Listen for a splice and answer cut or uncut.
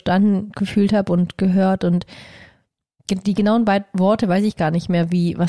uncut